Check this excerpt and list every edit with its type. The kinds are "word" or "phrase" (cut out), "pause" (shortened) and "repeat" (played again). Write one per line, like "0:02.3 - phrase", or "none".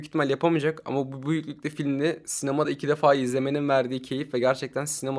none